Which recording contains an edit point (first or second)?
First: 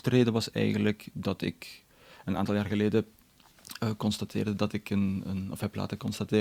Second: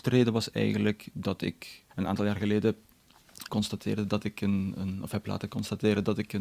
second